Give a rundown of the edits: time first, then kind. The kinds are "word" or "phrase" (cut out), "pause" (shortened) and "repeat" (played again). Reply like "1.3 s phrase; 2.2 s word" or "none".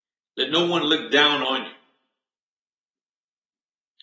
none